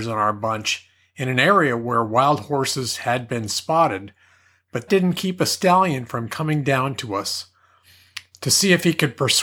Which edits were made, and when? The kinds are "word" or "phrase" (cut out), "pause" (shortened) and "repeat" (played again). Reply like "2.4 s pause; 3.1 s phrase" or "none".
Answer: 4.9 s word